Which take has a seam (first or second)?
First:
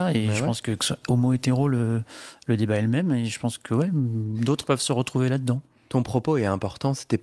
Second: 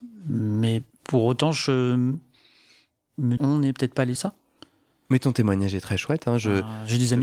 second